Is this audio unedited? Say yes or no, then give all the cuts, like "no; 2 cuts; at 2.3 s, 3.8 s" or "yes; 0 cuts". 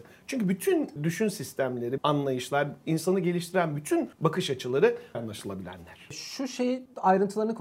no; 4 cuts; at 1.0 s, 2.0 s, 4.1 s, 5.1 s